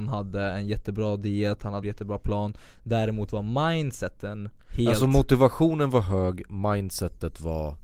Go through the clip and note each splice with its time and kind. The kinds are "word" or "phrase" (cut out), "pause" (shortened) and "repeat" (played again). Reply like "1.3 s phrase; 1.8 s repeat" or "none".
1.8 s phrase

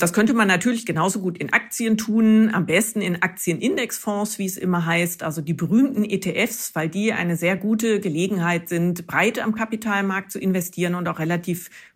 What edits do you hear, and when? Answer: none

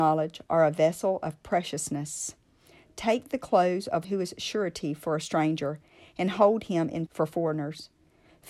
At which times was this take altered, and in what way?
4.0 s word; 7.1 s word

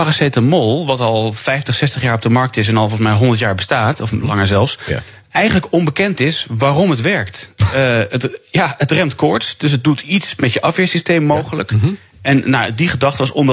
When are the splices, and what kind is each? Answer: none

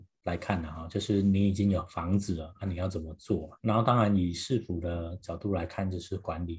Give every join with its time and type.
3.6 s pause

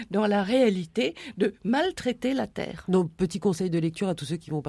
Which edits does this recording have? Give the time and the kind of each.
none

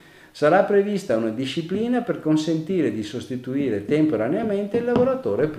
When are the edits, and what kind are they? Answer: none

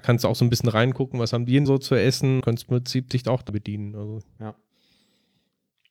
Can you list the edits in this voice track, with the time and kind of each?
1.7 s word; 2.4 s word; 3.5 s word

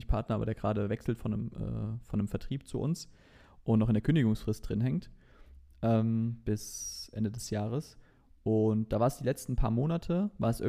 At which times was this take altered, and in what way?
none

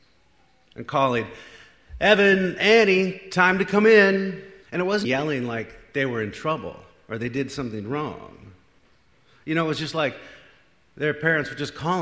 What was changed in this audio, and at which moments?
4.6 s pause; 5.0 s word

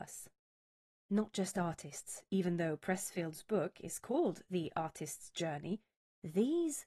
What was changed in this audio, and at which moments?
none

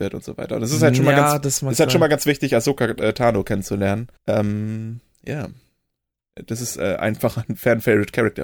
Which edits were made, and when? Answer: 4.2 s pause

